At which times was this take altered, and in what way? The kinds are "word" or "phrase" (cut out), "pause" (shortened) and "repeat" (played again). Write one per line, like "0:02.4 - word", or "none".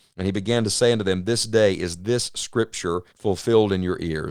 0:03.1 - pause